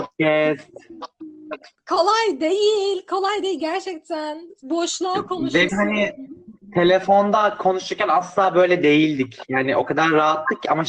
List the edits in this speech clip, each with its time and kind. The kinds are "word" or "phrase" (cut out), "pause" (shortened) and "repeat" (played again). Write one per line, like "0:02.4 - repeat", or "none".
0:01.7 - pause
0:05.7 - word